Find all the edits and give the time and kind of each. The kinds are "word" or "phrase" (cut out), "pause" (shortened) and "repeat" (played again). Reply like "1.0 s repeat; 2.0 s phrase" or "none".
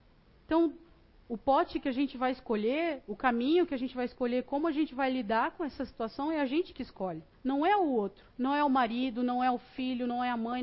7.3 s pause; 8.3 s pause